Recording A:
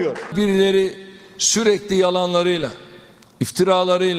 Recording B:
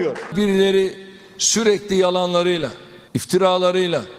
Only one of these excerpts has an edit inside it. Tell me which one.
B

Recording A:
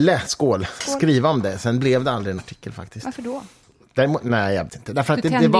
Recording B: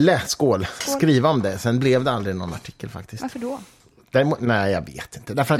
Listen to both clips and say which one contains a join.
A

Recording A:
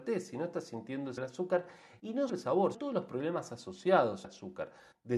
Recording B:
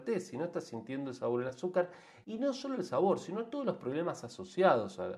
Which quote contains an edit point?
A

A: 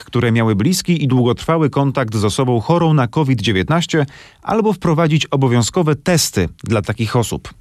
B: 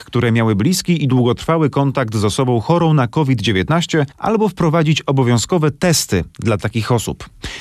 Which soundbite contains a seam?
B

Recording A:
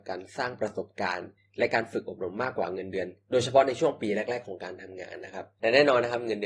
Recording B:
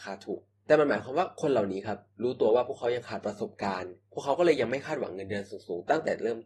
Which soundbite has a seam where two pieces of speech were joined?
B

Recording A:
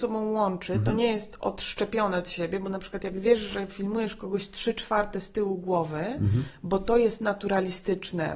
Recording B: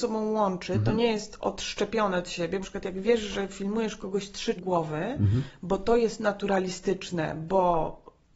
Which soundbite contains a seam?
B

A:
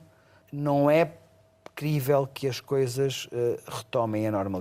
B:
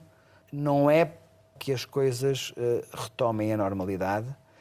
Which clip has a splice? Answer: B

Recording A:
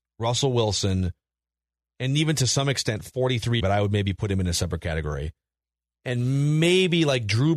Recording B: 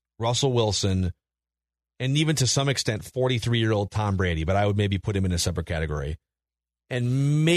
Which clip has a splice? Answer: A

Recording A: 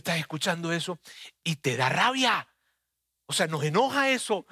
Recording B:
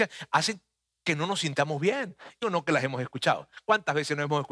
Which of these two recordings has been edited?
B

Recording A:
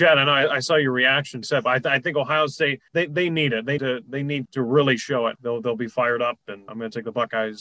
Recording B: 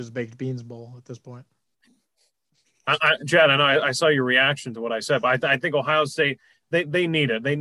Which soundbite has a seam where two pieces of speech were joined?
A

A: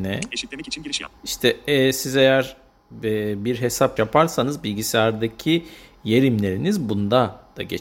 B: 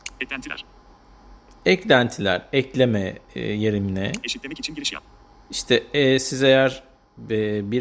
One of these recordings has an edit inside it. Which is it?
A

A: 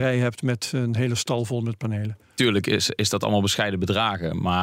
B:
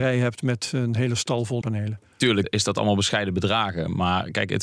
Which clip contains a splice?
B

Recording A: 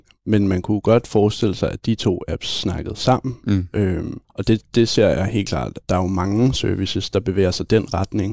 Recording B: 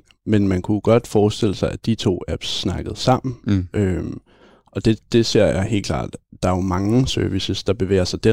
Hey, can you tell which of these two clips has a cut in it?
A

